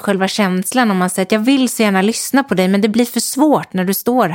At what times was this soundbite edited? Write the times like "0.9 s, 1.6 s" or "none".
none

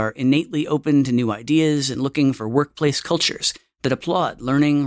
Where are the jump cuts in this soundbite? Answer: none

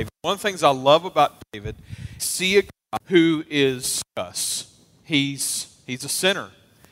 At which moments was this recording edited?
2.2 s, 3.0 s, 4.1 s

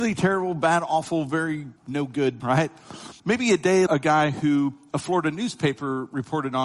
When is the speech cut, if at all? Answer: 1.8 s, 2.4 s, 3.2 s, 3.9 s

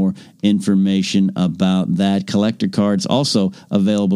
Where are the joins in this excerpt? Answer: none

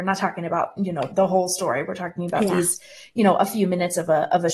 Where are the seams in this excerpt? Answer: none

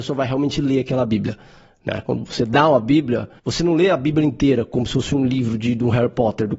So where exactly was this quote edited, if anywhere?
3.4 s

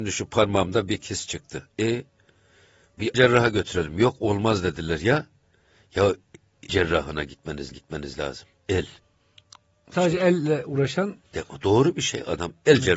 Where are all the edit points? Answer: 3.1 s, 6.7 s, 7.7 s, 11.2 s

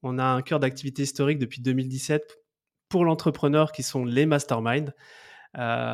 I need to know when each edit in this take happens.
none

